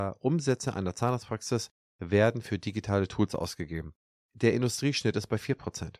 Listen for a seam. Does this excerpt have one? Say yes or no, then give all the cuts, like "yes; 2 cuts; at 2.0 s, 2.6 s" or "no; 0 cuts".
no; 0 cuts